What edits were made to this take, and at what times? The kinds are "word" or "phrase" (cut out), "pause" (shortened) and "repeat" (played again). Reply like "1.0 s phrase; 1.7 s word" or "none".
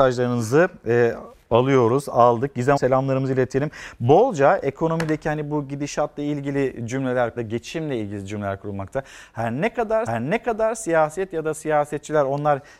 2.8 s word; 7.4 s phrase; 10.1 s repeat